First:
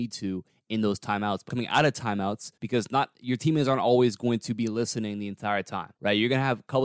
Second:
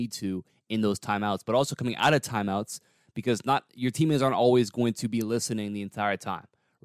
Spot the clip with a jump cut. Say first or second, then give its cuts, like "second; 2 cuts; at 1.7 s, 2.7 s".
first; 3 cuts; at 1.5 s, 2.6 s, 6.0 s